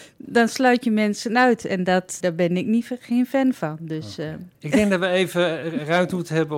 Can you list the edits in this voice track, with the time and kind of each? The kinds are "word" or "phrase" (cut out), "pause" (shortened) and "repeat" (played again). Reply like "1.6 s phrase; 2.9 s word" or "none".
2.2 s word; 4.5 s pause